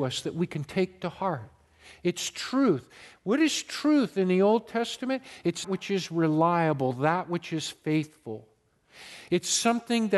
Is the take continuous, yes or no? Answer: no